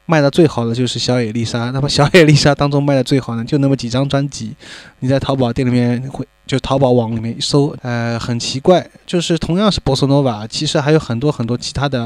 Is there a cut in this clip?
yes; 1 cut; at 7.8 s

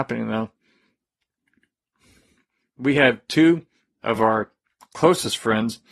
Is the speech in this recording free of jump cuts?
yes; 0 cuts

